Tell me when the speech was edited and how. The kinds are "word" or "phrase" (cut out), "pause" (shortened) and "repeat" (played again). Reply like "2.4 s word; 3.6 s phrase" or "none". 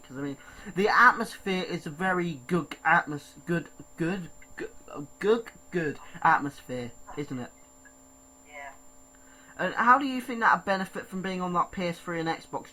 none